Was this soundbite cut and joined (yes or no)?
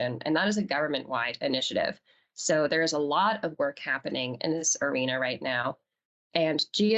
no